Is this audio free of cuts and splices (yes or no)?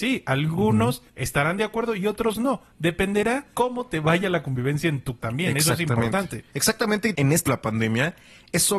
no